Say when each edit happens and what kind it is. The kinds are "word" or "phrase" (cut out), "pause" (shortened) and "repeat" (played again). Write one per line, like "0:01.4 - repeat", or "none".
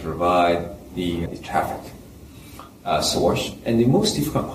0:01.3 - word